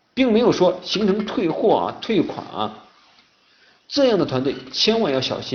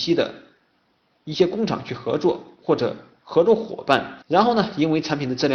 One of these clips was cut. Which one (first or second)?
second